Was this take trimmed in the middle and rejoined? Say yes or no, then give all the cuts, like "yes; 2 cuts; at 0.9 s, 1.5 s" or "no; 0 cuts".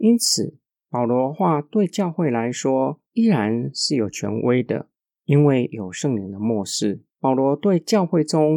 yes; 3 cuts; at 3.1 s, 5.0 s, 7.1 s